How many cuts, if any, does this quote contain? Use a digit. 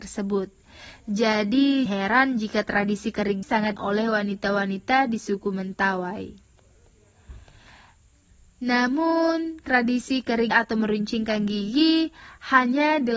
4